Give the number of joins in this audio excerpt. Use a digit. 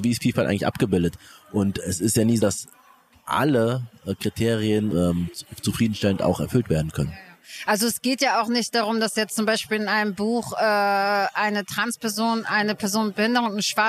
3